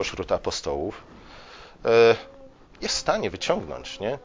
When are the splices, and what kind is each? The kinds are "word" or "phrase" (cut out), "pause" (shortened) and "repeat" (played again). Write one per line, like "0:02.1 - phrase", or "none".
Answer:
none